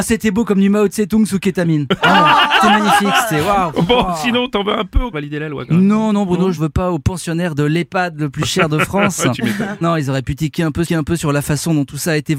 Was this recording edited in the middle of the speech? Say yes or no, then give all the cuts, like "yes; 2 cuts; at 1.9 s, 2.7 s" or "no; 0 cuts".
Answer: yes; 5 cuts; at 2.6 s, 5.1 s, 6.6 s, 9.8 s, 10.9 s